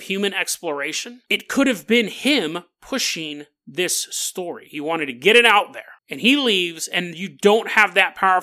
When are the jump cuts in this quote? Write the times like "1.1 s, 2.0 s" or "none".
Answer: 1.3 s, 6.0 s